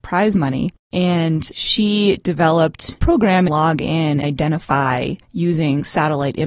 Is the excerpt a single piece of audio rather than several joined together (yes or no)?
no